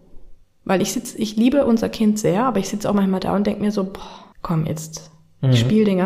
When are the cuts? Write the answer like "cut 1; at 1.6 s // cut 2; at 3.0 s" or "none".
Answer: cut 1; at 4.3 s